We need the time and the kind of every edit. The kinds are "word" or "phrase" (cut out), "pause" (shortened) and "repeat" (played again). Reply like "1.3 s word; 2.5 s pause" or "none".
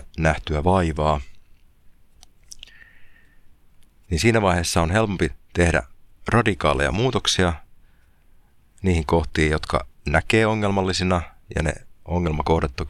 none